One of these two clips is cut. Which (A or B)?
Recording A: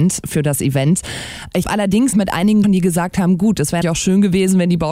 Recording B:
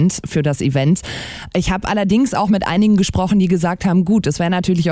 A